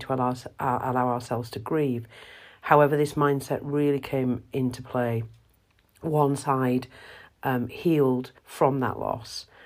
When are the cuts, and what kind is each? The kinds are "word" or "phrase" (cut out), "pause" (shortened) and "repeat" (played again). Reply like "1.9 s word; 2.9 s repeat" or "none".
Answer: 8.4 s pause